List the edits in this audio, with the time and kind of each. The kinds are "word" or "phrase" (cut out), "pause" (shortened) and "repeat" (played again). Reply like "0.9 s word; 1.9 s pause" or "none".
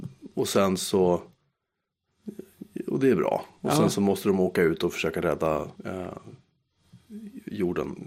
3.5 s pause; 5.7 s pause